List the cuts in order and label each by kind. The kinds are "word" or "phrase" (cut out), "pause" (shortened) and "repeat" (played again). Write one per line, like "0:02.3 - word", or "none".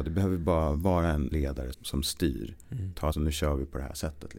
0:01.3 - word
0:01.7 - word
0:03.1 - phrase